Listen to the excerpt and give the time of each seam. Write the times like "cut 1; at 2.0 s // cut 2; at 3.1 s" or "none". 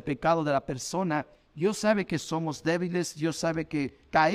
none